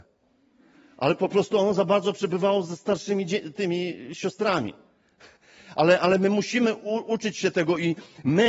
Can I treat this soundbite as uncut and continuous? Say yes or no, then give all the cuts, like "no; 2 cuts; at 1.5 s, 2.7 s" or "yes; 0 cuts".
yes; 0 cuts